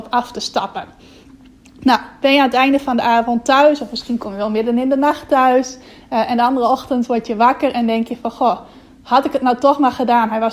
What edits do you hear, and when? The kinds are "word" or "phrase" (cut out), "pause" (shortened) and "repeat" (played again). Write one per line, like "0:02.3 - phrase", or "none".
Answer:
none